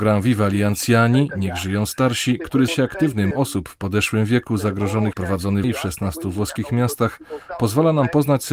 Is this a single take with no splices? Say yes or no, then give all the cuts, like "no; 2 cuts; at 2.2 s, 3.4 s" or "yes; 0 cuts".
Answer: no; 4 cuts; at 2.7 s, 3.3 s, 5.1 s, 5.6 s